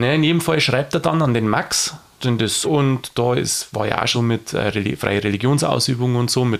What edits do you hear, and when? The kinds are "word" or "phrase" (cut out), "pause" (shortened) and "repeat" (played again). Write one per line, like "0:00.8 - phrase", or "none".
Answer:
0:02.2 - word
0:02.6 - word
0:04.1 - word